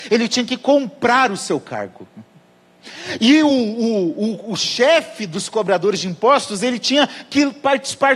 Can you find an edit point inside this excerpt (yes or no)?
no